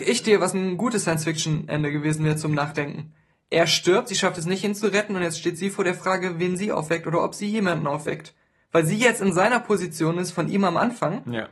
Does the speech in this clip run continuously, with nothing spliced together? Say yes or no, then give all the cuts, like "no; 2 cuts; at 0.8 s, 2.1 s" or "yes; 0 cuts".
yes; 0 cuts